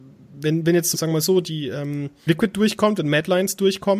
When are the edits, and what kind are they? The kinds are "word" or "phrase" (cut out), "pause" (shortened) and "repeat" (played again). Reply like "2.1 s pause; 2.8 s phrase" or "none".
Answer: 0.9 s word; 2.3 s word